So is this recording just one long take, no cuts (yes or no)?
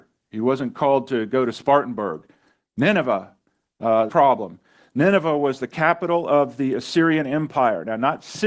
no